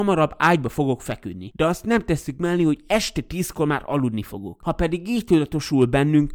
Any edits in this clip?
no; 0 cuts

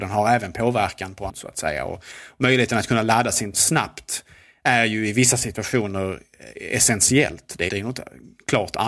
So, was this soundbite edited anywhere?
yes; 3 cuts; at 1.3 s, 3.5 s, 7.7 s

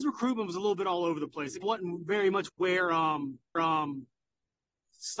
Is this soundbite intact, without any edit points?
no; 3 cuts; at 1.6 s, 2.5 s, 3.6 s

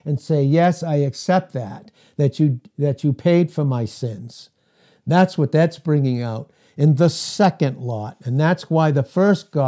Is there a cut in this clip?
no; 0 cuts

